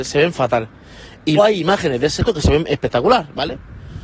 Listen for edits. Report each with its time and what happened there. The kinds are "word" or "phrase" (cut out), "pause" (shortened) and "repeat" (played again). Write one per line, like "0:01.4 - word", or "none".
0:01.4 - word
0:02.2 - word